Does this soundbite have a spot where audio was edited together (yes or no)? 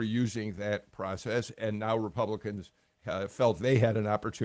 no